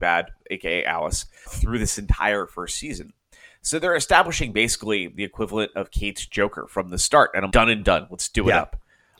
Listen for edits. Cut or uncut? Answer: cut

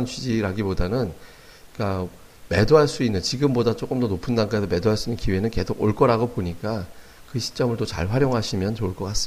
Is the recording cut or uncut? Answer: uncut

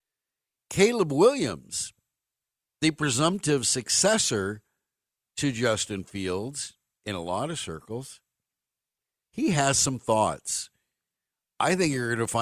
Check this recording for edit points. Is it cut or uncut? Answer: uncut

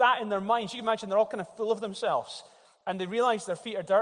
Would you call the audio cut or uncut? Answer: uncut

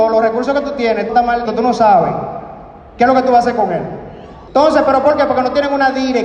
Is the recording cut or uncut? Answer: cut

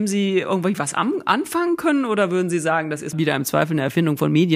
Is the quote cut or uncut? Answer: cut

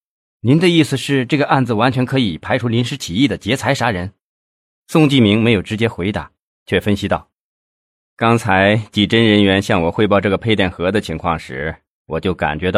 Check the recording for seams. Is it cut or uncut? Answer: uncut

